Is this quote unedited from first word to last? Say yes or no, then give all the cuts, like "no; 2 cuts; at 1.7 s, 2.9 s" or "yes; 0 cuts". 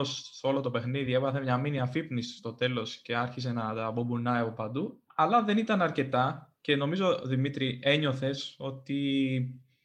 yes; 0 cuts